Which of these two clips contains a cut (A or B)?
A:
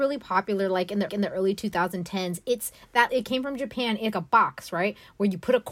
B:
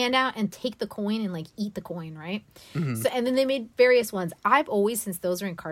A